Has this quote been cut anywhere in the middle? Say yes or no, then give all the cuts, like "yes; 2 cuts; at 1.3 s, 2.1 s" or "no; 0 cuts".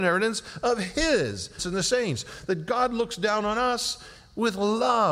yes; 1 cut; at 1.6 s